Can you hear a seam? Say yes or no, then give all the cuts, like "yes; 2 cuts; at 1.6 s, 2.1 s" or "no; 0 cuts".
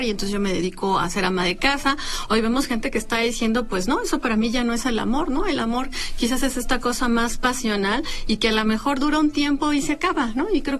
no; 0 cuts